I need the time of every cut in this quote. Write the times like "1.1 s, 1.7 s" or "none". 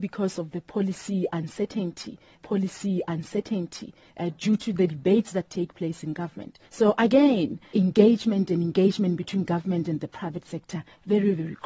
2.4 s, 6.6 s, 7.7 s